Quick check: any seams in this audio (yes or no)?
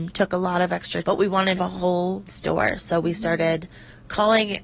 yes